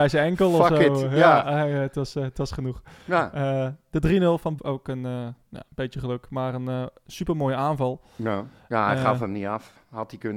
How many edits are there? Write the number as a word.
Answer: one